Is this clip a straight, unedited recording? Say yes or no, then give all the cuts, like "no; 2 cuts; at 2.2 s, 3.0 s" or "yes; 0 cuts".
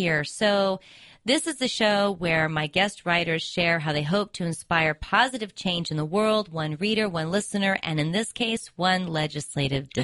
yes; 0 cuts